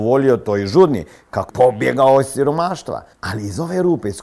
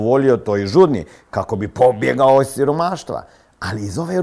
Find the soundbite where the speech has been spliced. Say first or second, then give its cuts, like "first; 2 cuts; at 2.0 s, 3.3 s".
first; 2 cuts; at 1.5 s, 3.1 s